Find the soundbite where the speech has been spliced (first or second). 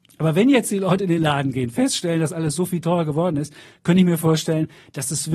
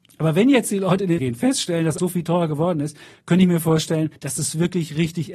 second